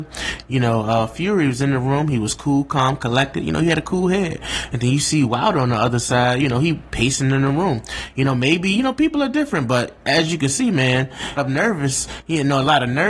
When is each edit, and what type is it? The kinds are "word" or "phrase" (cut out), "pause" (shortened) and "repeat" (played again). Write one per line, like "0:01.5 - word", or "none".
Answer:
0:11.4 - phrase